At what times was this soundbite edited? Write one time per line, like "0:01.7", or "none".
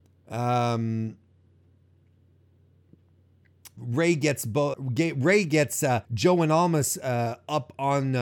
0:03.8
0:04.7
0:06.0